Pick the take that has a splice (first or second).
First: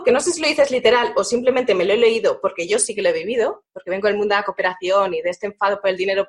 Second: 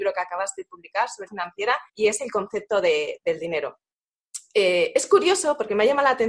second